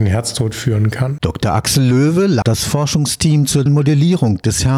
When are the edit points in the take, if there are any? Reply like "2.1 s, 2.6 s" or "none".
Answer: 2.4 s, 3.7 s